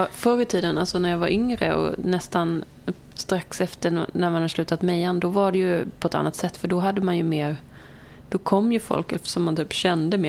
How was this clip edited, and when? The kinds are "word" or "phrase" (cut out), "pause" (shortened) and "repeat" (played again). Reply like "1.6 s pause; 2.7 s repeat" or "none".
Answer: none